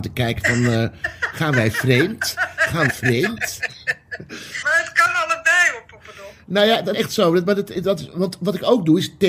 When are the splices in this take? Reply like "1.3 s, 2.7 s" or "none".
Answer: 2.9 s, 4.6 s, 6.9 s, 7.7 s